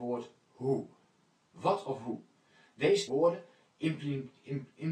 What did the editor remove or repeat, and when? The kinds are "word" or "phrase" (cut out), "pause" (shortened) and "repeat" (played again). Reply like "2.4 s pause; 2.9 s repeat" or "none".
3.1 s word